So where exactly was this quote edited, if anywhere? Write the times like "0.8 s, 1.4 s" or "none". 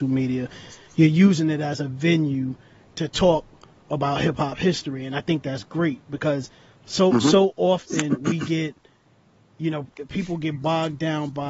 none